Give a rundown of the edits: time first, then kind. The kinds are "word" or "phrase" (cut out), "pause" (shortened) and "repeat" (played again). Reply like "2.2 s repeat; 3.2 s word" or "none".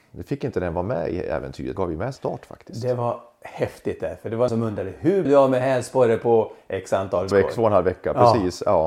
1.8 s phrase; 2.2 s phrase; 4.5 s word; 5.3 s word; 7.3 s word